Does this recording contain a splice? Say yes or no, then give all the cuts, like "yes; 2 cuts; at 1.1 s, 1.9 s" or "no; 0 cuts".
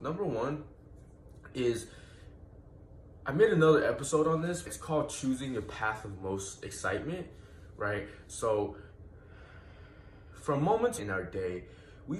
yes; 2 cuts; at 4.6 s, 11.0 s